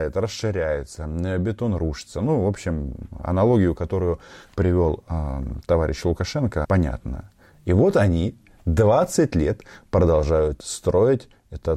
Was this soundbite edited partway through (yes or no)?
yes